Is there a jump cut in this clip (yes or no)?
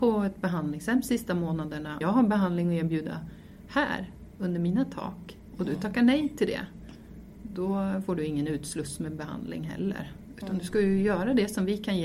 yes